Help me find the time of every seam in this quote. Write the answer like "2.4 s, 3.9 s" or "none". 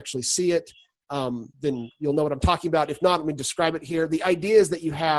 1.5 s